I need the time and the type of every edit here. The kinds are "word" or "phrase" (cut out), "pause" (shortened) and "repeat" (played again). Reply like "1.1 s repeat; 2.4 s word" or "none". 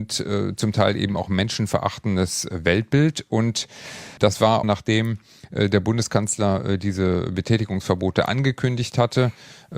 4.6 s phrase